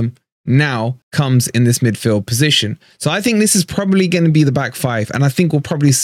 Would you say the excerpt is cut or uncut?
cut